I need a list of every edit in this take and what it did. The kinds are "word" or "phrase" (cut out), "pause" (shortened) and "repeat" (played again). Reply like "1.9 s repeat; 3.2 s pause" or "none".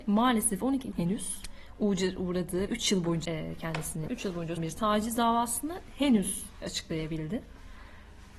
0.9 s word; 2.7 s word; 3.2 s word; 4.1 s word; 4.6 s word; 6.6 s word